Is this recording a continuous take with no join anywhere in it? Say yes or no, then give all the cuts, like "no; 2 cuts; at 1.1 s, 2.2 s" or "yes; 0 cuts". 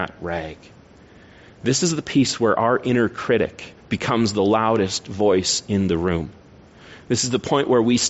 no; 1 cut; at 3.8 s